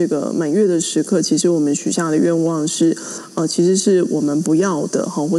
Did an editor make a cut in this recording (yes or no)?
no